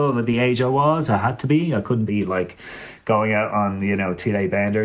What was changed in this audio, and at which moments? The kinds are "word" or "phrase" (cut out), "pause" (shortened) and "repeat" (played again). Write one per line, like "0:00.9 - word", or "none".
none